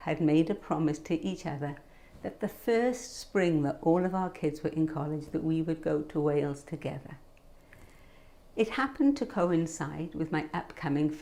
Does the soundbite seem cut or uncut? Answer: uncut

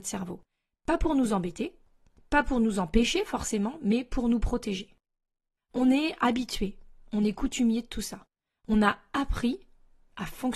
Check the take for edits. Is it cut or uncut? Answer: uncut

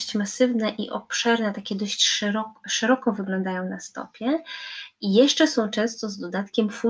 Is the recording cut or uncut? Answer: uncut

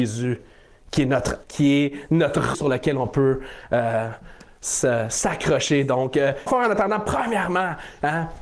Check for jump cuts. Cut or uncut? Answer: cut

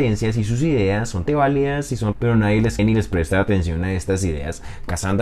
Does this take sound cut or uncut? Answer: cut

